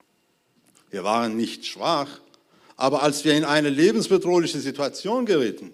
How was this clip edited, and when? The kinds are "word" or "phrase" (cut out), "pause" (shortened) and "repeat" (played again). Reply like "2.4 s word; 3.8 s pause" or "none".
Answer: none